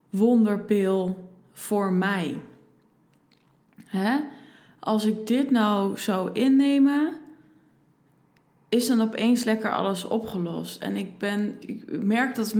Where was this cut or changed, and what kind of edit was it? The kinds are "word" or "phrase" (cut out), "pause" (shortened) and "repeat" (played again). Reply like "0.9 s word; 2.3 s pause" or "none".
11.6 s word